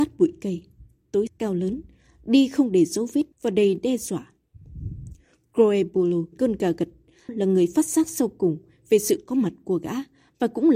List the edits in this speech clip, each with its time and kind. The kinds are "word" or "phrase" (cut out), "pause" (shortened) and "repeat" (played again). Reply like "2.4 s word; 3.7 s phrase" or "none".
1.3 s word; 3.3 s pause; 6.3 s phrase; 7.3 s word